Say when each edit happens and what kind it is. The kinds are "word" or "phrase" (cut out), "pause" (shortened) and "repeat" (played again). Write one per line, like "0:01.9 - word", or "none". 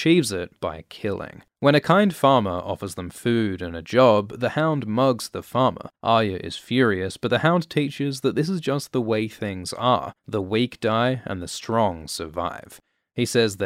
0:01.5 - pause
0:06.0 - pause
0:10.2 - pause